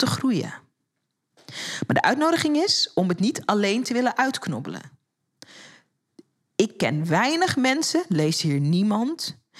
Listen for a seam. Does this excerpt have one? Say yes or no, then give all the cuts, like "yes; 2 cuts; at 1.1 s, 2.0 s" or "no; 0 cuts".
no; 0 cuts